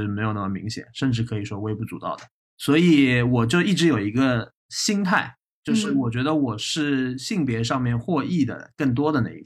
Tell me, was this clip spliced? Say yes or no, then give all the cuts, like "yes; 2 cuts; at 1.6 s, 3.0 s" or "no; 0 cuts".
yes; 2 cuts; at 2.4 s, 4.6 s